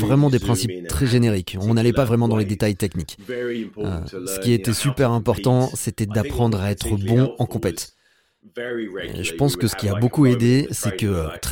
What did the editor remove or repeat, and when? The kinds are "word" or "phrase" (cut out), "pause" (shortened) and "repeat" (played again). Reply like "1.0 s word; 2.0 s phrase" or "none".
none